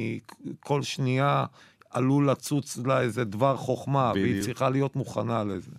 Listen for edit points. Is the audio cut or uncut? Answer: uncut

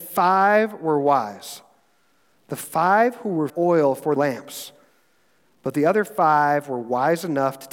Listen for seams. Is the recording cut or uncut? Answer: cut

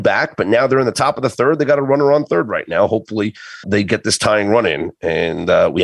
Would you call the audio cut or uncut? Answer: cut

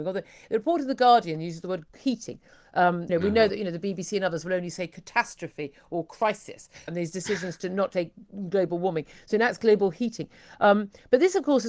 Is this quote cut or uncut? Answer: cut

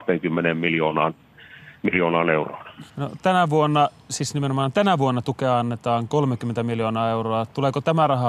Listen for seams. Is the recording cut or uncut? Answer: cut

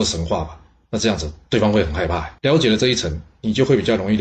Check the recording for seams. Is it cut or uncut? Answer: cut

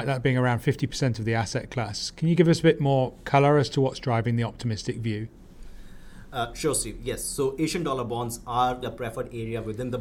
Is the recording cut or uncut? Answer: cut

